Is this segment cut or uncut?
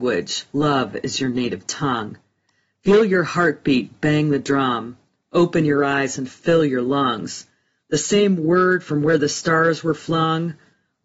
uncut